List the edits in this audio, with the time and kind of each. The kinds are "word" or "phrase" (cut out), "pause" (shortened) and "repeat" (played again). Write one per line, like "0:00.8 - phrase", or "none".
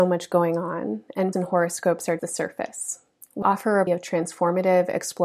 0:01.3 - word
0:02.2 - word
0:03.4 - word
0:03.9 - word